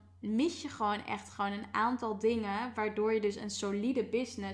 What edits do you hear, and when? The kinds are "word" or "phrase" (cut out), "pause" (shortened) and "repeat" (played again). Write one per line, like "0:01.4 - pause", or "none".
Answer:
none